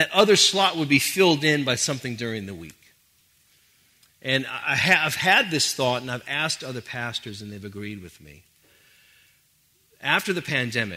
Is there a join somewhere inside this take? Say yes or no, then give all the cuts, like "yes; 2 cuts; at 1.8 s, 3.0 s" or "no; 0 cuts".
no; 0 cuts